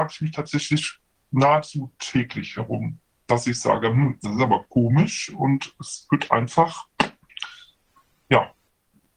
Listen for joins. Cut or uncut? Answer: uncut